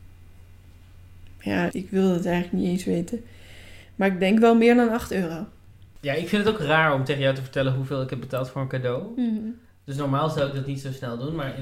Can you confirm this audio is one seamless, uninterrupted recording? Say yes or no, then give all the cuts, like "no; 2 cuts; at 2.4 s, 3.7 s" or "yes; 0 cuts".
no; 1 cut; at 1.7 s